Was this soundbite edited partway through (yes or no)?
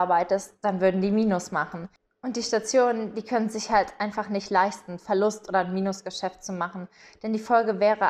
no